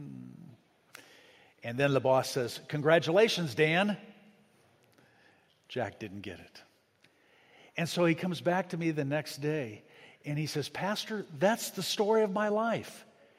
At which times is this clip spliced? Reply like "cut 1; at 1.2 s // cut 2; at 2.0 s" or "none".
none

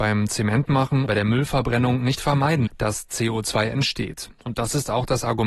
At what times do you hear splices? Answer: cut 1; at 1.1 s // cut 2; at 2.7 s

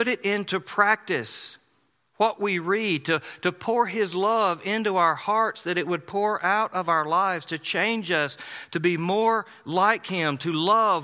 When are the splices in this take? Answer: none

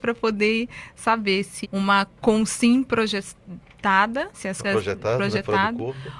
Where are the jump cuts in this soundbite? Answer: cut 1; at 1.6 s // cut 2; at 4.3 s // cut 3; at 4.6 s

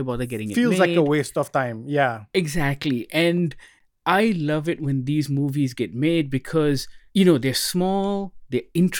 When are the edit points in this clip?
cut 1; at 7.1 s

